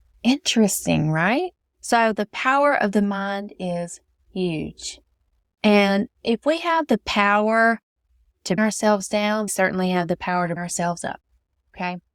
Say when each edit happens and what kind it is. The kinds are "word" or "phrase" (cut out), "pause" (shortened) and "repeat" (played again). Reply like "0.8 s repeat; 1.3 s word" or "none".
1.6 s pause; 8.6 s word; 9.5 s phrase; 10.6 s word